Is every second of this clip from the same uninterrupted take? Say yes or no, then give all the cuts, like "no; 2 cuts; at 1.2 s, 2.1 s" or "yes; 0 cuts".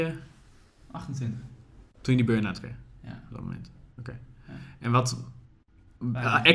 yes; 0 cuts